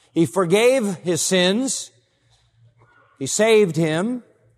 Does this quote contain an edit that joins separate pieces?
no; 0 cuts

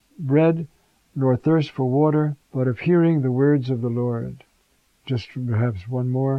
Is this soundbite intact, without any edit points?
no; 2 cuts; at 2.4 s, 4.6 s

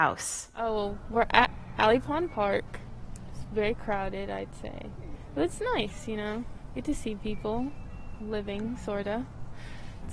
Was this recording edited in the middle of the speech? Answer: no; 0 cuts

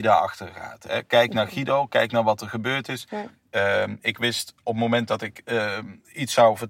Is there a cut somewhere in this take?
no; 0 cuts

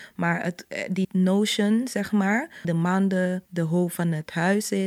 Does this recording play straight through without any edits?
no; 3 cuts; at 1.0 s, 2.6 s, 3.4 s

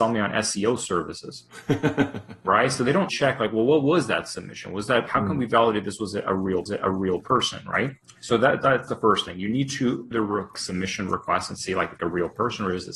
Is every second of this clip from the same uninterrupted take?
no; 8 cuts; at 3.1 s, 5.1 s, 6.7 s, 8.0 s, 8.9 s, 10.1 s, 10.5 s, 12.0 s

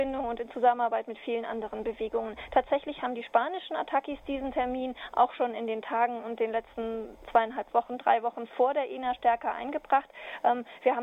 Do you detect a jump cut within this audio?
no; 0 cuts

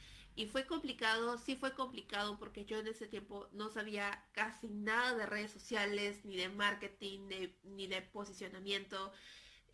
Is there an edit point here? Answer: no; 0 cuts

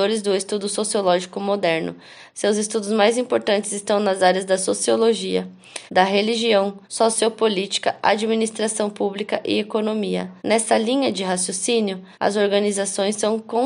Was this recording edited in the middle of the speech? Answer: yes; 4 cuts; at 5.9 s, 6.8 s, 10.4 s, 12.1 s

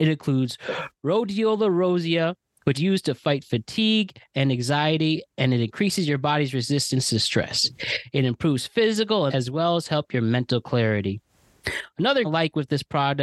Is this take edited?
yes; 3 cuts; at 2.7 s, 9.3 s, 12.2 s

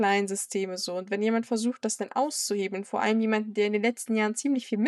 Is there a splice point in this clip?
no; 0 cuts

